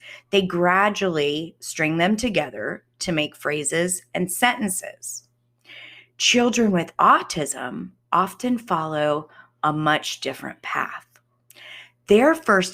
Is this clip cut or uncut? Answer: uncut